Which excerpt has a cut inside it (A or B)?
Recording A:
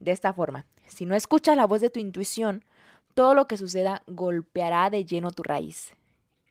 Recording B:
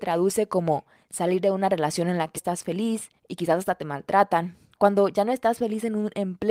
B